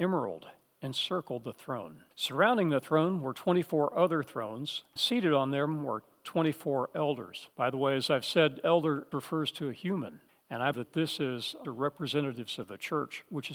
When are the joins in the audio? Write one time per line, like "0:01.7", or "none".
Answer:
0:02.1
0:05.0
0:07.5
0:09.1
0:10.3
0:10.7
0:11.6